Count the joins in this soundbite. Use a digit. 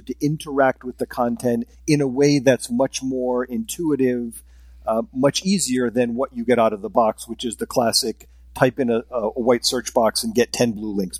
1